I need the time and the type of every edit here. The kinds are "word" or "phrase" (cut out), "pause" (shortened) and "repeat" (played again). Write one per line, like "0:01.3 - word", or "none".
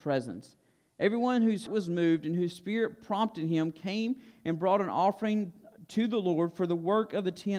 0:01.7 - word